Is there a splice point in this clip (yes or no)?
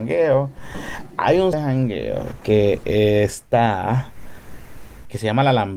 yes